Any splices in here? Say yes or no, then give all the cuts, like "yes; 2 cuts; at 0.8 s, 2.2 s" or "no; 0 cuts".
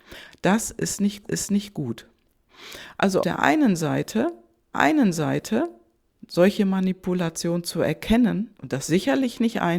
yes; 5 cuts; at 1.2 s, 3.2 s, 4.7 s, 8.5 s, 8.9 s